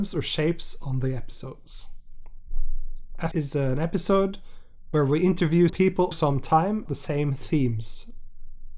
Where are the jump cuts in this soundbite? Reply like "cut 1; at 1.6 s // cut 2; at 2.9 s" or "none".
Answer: cut 1; at 3.3 s // cut 2; at 5.7 s // cut 3; at 6.1 s // cut 4; at 6.9 s